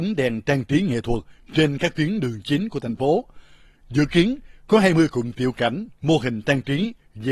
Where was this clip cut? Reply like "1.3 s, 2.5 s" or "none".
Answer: none